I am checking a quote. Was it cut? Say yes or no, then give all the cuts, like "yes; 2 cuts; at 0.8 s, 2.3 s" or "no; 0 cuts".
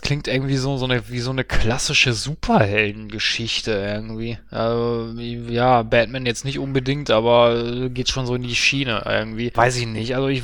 no; 0 cuts